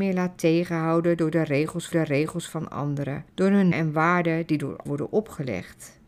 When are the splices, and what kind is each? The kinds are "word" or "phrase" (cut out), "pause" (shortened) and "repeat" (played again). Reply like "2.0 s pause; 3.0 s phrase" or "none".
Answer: 1.9 s repeat; 3.3 s pause; 3.7 s word; 4.9 s word